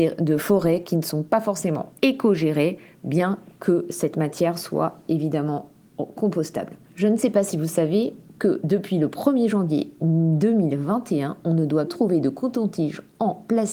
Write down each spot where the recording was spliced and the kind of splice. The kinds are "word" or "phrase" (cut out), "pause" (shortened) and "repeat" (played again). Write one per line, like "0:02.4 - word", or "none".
0:02.0 - pause
0:11.9 - word